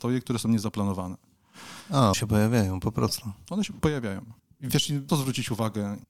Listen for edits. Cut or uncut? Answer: cut